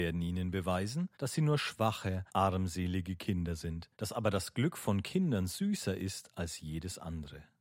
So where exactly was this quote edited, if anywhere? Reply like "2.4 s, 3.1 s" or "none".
1.1 s, 2.3 s, 3.9 s